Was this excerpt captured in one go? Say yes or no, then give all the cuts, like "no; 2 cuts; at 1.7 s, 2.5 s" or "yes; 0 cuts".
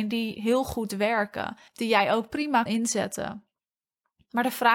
no; 2 cuts; at 1.7 s, 2.7 s